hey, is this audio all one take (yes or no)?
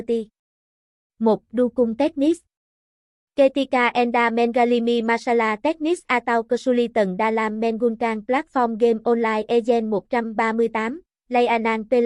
yes